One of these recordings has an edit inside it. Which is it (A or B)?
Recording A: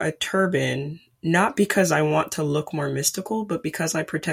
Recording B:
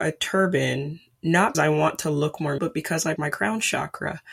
B